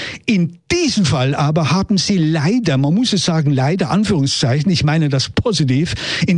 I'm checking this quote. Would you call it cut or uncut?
uncut